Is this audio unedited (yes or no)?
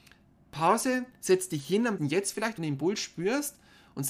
no